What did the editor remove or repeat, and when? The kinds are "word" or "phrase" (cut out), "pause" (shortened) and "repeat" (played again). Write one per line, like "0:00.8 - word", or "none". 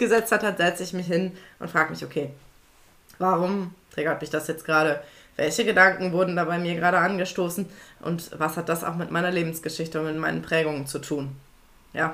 none

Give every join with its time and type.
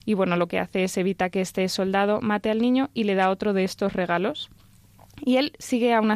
none

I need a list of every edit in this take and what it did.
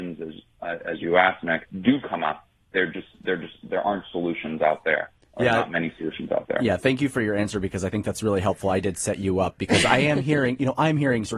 0:01.7 - pause

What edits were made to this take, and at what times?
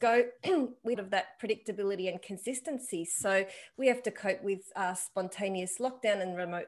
0:00.9 - phrase

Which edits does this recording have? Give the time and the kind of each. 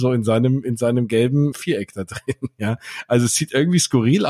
0:01.5 - word

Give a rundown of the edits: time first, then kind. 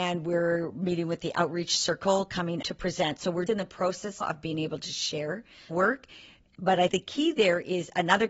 0:02.6 - word
0:03.5 - word
0:04.2 - word
0:05.7 - word
0:06.9 - word

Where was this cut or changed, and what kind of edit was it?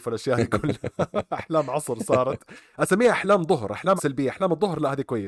0:04.0 - word

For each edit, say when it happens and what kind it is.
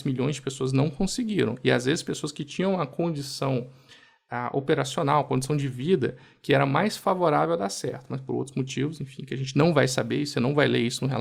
none

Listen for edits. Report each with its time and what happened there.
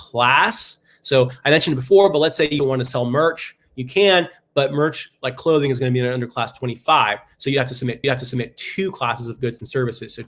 0:02.6 - word
0:08.0 - repeat

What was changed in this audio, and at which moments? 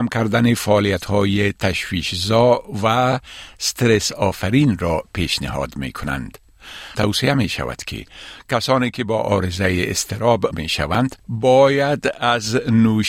0:06.9 - word
0:10.5 - word
0:11.2 - pause

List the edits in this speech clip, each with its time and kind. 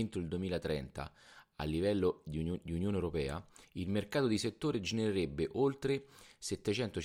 0:03.6 - pause

